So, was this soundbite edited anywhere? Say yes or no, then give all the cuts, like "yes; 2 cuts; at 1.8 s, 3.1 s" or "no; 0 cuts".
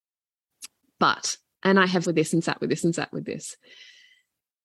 yes; 1 cut; at 2.0 s